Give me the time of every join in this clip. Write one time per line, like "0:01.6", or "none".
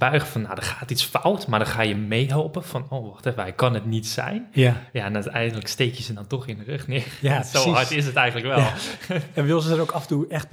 none